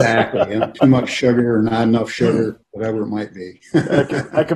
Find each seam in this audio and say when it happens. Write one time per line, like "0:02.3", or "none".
0:02.6